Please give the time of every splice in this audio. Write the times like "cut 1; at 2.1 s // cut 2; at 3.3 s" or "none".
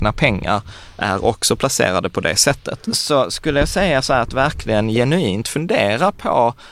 none